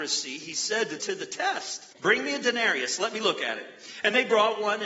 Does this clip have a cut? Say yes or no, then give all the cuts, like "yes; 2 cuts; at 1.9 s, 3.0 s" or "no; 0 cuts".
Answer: yes; 2 cuts; at 1.0 s, 1.9 s